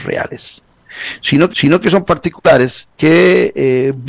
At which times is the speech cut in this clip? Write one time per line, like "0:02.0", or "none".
0:01.5
0:02.0
0:02.9